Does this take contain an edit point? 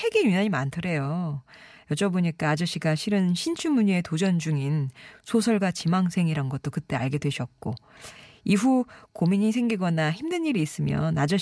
no; 0 cuts

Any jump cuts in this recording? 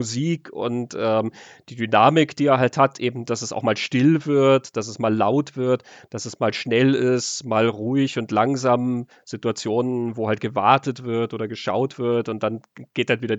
no; 0 cuts

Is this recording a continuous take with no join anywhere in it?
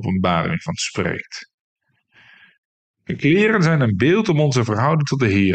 yes; 0 cuts

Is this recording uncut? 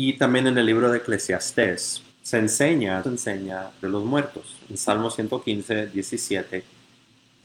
no; 3 cuts; at 2.1 s, 3.0 s, 3.8 s

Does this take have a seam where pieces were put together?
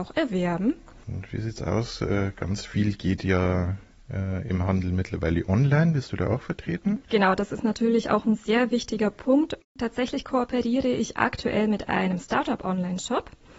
yes; 1 cut; at 7.0 s

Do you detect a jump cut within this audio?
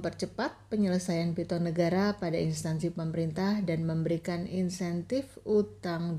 no; 0 cuts

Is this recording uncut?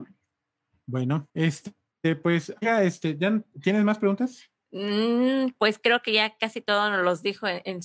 no; 1 cut; at 1.3 s

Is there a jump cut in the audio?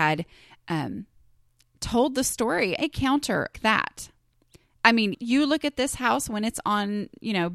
yes; 3 cuts; at 2.8 s, 3.5 s, 5.1 s

